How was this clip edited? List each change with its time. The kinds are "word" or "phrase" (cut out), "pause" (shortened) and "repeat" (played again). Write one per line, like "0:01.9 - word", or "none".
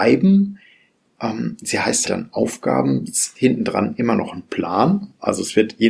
0:02.1 - word
0:03.3 - word